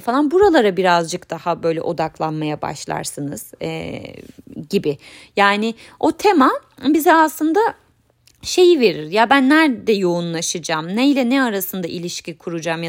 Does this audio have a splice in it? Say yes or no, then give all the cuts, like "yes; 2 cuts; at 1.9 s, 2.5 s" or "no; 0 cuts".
no; 0 cuts